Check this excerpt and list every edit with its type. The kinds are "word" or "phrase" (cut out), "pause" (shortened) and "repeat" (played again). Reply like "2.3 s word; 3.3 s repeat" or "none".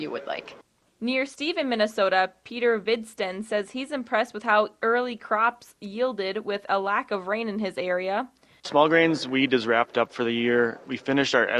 none